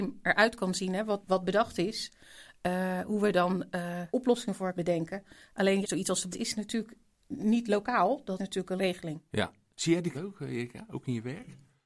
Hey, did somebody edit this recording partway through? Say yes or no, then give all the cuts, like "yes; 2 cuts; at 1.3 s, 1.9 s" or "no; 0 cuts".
yes; 8 cuts; at 1.2 s, 4.1 s, 4.7 s, 5.8 s, 6.3 s, 8.4 s, 8.8 s, 10.1 s